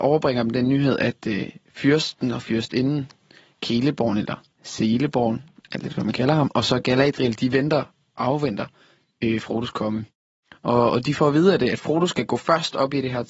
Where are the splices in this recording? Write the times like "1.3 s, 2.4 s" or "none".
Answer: 4.5 s